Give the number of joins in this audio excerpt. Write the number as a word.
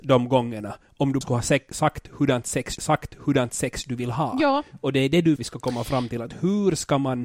three